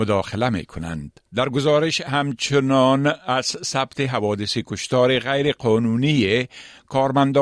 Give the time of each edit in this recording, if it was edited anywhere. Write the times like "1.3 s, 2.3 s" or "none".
1.3 s